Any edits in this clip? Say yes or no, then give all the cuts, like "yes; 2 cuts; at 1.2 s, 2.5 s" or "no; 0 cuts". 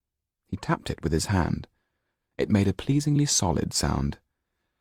no; 0 cuts